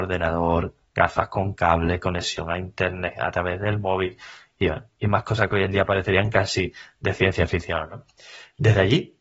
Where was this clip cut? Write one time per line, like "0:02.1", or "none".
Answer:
none

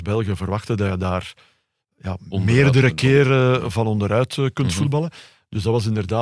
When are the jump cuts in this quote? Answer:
none

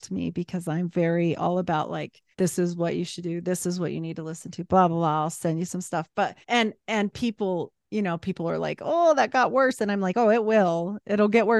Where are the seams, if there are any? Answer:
0:02.3
0:06.4

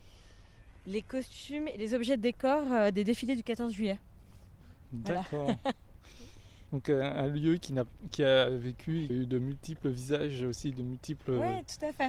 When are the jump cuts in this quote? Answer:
0:09.1

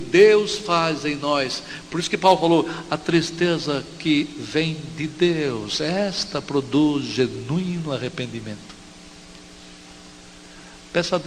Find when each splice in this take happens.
none

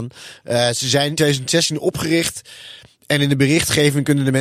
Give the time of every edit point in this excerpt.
0:01.2

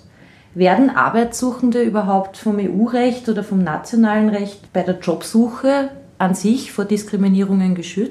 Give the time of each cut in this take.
0:04.7

